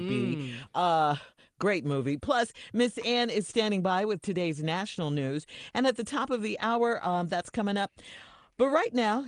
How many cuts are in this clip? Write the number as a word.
zero